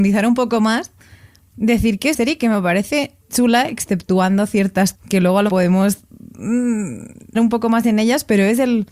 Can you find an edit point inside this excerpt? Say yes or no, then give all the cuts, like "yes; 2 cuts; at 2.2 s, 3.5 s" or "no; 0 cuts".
yes; 5 cuts; at 2.1 s, 3.3 s, 4.9 s, 5.5 s, 7.3 s